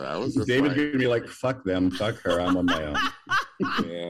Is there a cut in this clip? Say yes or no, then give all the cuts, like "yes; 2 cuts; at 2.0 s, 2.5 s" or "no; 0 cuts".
no; 0 cuts